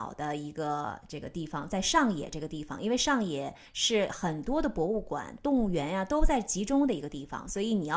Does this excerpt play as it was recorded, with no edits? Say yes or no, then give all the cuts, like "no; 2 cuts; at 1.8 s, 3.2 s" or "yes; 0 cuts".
yes; 0 cuts